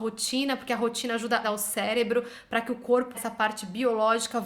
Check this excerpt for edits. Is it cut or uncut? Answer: cut